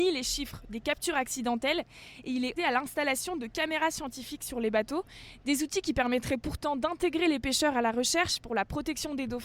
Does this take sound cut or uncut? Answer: cut